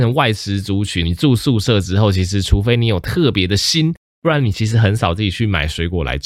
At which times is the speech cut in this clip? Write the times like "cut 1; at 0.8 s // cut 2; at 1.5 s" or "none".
cut 1; at 1.0 s

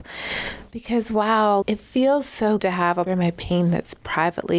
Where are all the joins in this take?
cut 1; at 1.6 s // cut 2; at 2.6 s // cut 3; at 3.1 s

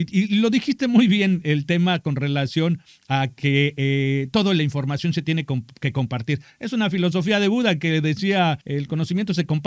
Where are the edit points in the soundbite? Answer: cut 1; at 1.4 s // cut 2; at 8.6 s

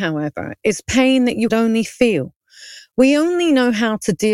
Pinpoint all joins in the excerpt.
cut 1; at 1.5 s

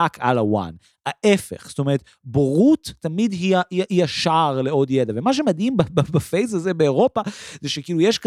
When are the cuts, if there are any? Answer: none

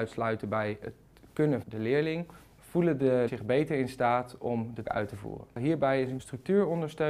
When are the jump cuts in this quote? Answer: cut 1; at 1.6 s // cut 2; at 3.3 s // cut 3; at 4.8 s // cut 4; at 6.2 s

